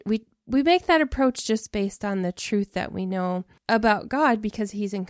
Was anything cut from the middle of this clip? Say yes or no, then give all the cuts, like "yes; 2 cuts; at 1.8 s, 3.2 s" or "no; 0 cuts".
yes; 1 cut; at 3.6 s